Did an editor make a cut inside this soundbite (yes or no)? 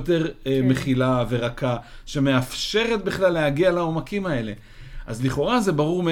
no